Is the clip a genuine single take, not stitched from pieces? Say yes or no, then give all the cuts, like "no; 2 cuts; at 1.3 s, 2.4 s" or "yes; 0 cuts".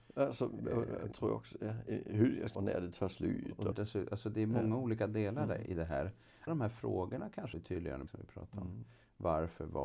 no; 7 cuts; at 1.1 s, 2.5 s, 3.7 s, 5.7 s, 6.5 s, 7.5 s, 8.1 s